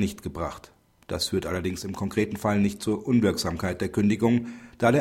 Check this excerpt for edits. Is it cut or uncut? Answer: uncut